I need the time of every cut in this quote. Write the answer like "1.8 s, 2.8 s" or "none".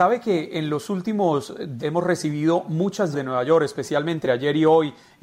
1.8 s, 3.1 s, 4.2 s